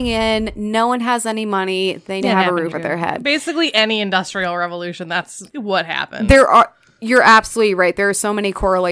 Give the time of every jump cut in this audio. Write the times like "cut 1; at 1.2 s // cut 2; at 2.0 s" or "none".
cut 1; at 2.2 s // cut 2; at 2.7 s // cut 3; at 5.5 s